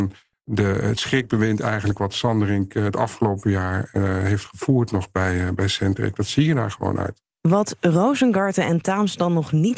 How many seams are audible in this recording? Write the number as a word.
zero